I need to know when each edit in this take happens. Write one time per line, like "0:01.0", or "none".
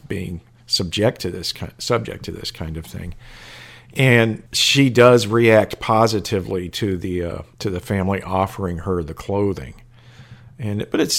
0:04.5
0:07.5